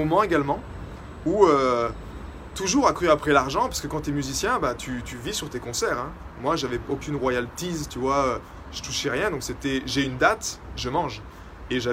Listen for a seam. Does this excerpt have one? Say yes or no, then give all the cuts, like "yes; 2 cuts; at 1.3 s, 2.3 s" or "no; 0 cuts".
no; 0 cuts